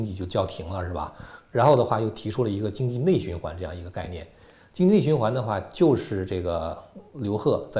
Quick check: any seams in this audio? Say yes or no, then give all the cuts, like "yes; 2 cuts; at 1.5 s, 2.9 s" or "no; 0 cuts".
no; 0 cuts